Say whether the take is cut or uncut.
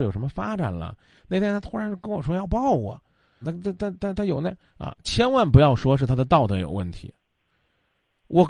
cut